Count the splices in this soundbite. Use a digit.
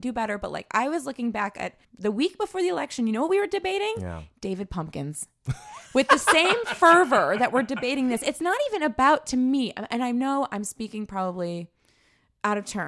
1